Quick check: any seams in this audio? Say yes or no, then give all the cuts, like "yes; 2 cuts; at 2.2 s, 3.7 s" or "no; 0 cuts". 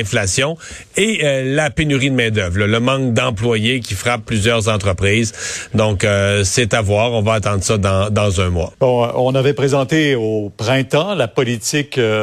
yes; 1 cut; at 8.7 s